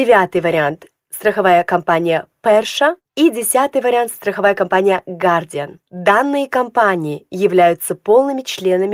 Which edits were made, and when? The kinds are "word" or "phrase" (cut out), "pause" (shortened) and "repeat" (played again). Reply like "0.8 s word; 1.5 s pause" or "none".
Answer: 3.0 s pause; 5.9 s pause